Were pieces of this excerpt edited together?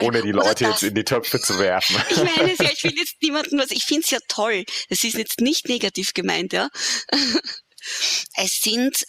no; 0 cuts

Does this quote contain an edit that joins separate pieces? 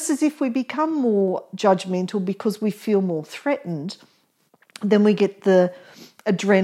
no; 0 cuts

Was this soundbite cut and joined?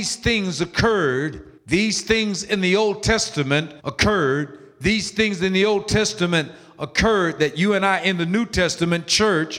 yes; 2 cuts; at 1.6 s, 3.8 s

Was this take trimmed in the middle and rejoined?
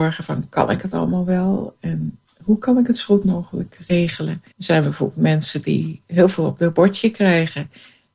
yes; 1 cut; at 4.5 s

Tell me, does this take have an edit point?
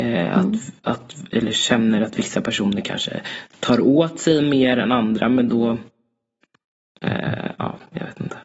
no; 0 cuts

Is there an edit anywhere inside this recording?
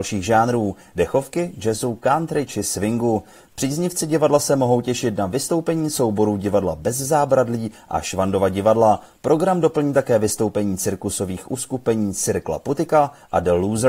no; 0 cuts

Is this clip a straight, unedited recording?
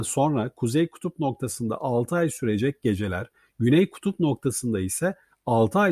yes; 0 cuts

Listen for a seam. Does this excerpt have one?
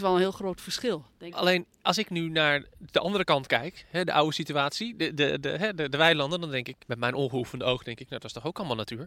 yes; 1 cut; at 6.8 s

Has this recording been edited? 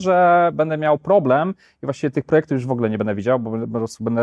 no; 0 cuts

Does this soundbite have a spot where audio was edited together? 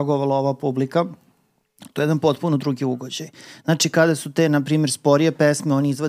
no; 0 cuts

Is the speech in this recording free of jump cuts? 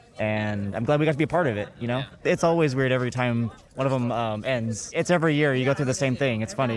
yes; 0 cuts

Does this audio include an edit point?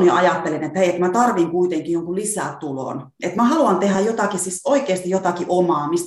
no; 0 cuts

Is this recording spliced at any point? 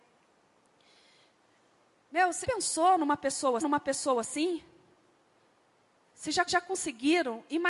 yes; 3 cuts; at 2.4 s, 3.6 s, 6.5 s

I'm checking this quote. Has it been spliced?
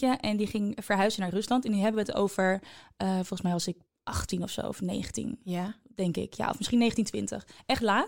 yes; 1 cut; at 3.9 s

